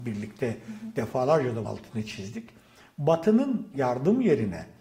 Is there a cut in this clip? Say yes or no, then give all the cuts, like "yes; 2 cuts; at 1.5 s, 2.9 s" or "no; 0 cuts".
yes; 2 cuts; at 1.6 s, 3.7 s